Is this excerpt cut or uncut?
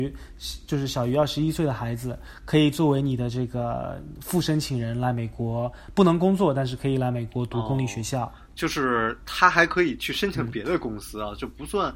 uncut